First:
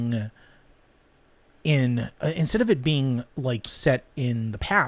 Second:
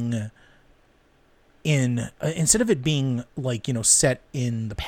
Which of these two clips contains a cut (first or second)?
first